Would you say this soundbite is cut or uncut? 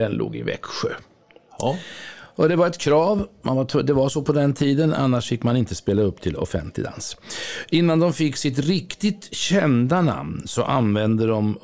uncut